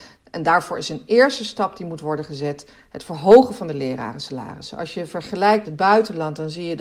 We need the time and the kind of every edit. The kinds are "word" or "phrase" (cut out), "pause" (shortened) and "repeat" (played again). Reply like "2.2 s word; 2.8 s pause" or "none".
5.6 s word